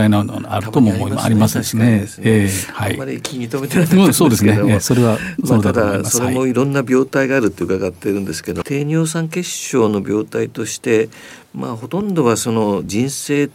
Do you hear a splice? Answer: yes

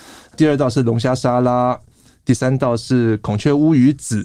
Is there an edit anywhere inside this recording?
no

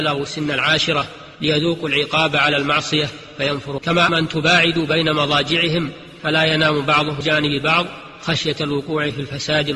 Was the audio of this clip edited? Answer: yes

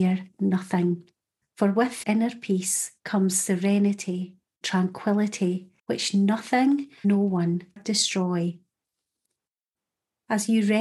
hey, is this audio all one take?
no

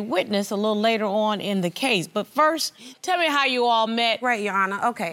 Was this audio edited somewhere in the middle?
no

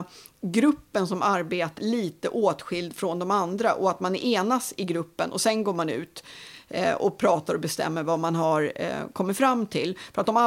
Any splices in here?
yes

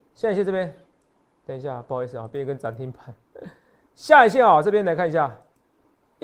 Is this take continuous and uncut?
yes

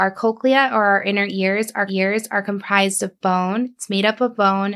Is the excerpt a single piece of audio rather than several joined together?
no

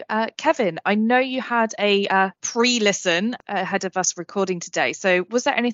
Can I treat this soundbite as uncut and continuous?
no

